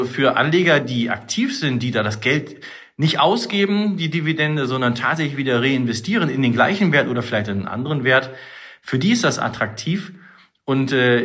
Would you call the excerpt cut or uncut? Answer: uncut